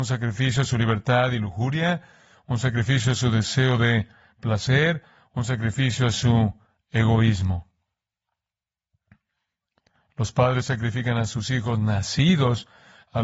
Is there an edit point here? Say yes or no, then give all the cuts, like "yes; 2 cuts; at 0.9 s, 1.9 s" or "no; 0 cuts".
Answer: no; 0 cuts